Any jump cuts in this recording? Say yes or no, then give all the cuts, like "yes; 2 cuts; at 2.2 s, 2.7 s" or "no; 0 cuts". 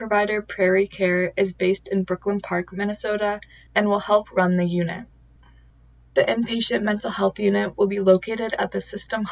no; 0 cuts